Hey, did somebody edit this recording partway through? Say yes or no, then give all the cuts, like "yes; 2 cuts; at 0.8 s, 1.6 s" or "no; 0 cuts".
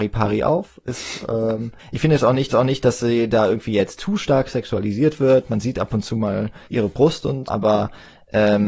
yes; 4 cuts; at 1.8 s, 2.5 s, 6.6 s, 7.5 s